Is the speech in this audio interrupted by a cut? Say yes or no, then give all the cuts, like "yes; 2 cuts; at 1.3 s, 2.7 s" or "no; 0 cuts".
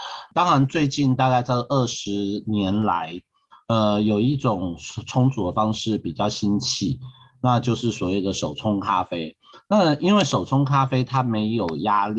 no; 0 cuts